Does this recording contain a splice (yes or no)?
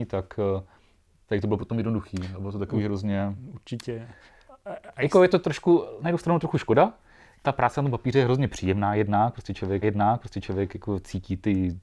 yes